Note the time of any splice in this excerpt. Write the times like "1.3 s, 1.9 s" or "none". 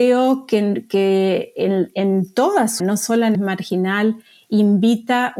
2.8 s, 3.3 s